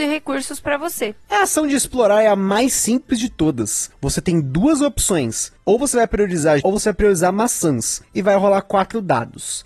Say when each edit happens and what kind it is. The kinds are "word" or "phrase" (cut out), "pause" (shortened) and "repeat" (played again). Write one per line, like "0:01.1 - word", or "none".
0:06.6 - word